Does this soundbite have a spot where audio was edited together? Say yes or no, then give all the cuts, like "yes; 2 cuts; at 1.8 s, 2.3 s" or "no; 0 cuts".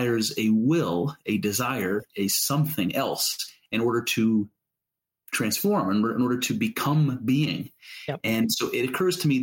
no; 0 cuts